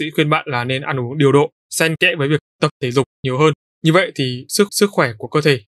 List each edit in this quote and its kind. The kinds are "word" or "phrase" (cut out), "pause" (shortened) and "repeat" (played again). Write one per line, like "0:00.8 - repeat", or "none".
0:01.6 - pause
0:04.7 - repeat